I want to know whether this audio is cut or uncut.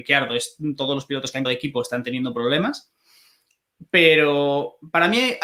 cut